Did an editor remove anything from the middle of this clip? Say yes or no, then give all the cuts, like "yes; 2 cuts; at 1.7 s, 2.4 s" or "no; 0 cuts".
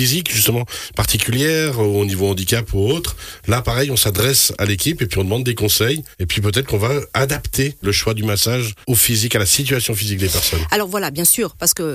yes; 3 cuts; at 6.1 s, 7.8 s, 8.8 s